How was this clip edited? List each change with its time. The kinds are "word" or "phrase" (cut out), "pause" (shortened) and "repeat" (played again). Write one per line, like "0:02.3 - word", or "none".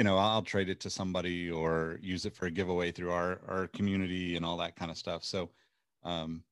none